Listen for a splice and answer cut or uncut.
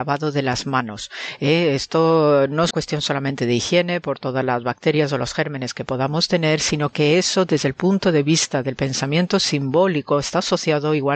cut